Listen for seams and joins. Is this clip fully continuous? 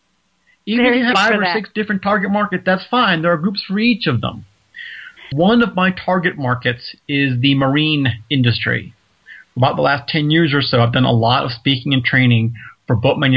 no; 2 cuts; at 1.1 s, 5.3 s

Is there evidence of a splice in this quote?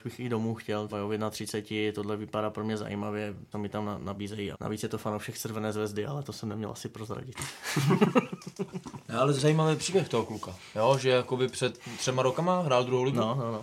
yes; 4 cuts; at 0.9 s, 3.5 s, 4.5 s, 9.4 s

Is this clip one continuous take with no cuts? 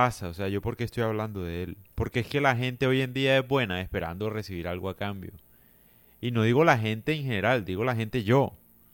no; 1 cut; at 1.9 s

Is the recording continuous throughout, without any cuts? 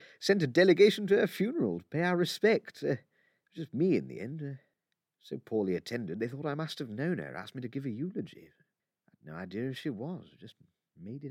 yes; 0 cuts

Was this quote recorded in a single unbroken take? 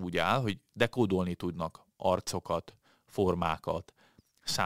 yes; 0 cuts

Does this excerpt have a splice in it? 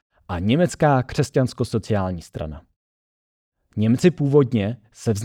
no; 0 cuts

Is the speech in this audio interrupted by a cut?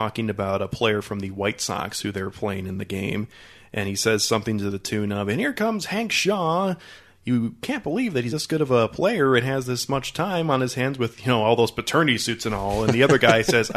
yes; 1 cut; at 8.3 s

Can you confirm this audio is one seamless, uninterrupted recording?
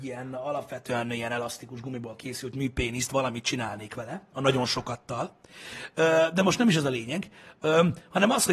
yes; 0 cuts

